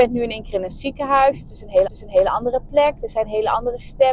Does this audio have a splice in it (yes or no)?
yes